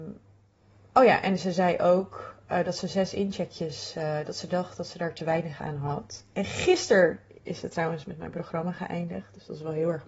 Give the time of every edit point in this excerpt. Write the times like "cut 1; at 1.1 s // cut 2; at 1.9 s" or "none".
none